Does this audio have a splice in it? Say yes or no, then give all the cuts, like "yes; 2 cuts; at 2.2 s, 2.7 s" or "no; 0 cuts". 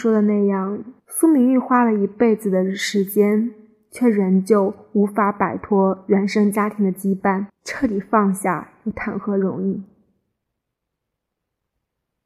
yes; 2 cuts; at 1.0 s, 7.5 s